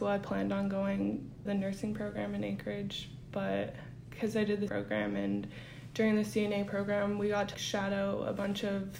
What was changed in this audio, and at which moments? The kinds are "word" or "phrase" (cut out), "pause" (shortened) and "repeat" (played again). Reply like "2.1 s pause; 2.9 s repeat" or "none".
1.5 s word; 4.7 s word; 7.5 s word